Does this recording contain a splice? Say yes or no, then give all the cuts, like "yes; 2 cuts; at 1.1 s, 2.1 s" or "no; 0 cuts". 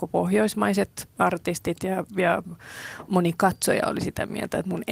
no; 0 cuts